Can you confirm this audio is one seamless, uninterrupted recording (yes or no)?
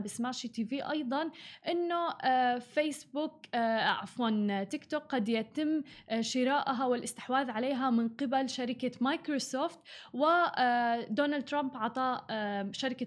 yes